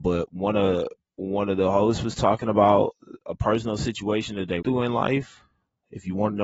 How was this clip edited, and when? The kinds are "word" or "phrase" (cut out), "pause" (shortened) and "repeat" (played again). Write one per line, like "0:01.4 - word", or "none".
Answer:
0:04.6 - phrase